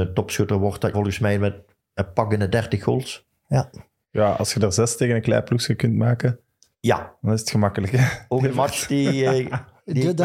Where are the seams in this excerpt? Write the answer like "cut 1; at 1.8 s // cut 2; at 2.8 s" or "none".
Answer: cut 1; at 0.9 s